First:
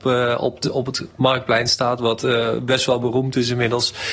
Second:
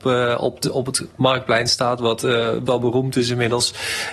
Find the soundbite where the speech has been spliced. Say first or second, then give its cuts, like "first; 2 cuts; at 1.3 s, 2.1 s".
second; 1 cut; at 2.7 s